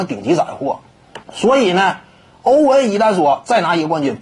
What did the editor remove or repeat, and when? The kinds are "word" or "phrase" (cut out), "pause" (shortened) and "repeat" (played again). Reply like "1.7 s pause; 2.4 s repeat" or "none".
1.2 s pause

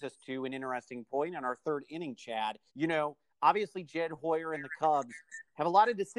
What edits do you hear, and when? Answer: 2.7 s pause

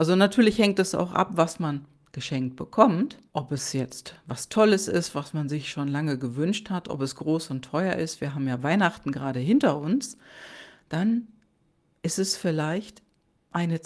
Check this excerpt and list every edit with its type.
3.3 s pause

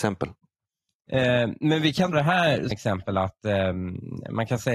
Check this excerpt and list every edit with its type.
2.1 s word; 2.7 s word

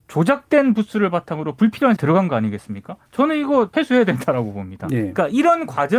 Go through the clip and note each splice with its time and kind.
2.0 s word; 3.1 s pause; 3.7 s word

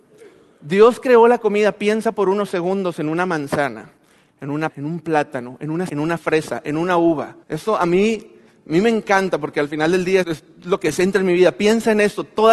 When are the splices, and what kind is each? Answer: 4.7 s word; 5.9 s word; 7.4 s pause; 10.2 s word

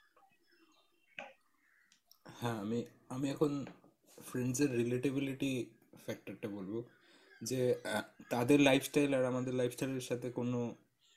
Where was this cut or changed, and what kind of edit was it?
none

